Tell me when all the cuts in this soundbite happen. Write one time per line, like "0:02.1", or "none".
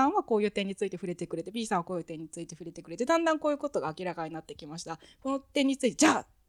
none